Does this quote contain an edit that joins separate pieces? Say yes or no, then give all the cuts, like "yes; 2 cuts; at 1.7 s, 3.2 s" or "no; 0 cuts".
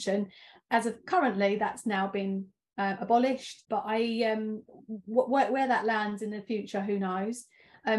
no; 0 cuts